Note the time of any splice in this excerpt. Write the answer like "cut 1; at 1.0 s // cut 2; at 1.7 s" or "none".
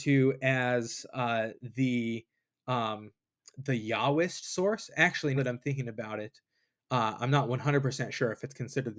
cut 1; at 5.4 s